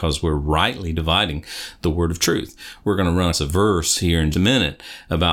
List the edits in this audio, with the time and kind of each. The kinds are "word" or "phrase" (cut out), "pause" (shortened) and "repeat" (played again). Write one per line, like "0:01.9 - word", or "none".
0:03.3 - word
0:04.3 - word